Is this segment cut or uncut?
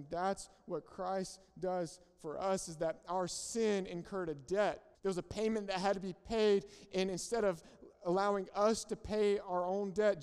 cut